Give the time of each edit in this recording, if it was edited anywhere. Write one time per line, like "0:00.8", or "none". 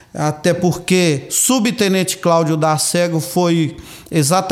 none